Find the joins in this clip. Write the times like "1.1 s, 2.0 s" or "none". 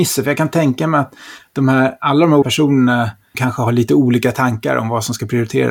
2.4 s, 3.3 s